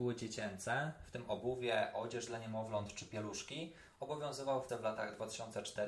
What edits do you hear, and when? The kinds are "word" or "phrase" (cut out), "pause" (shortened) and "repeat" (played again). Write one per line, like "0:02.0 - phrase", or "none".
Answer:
0:04.7 - word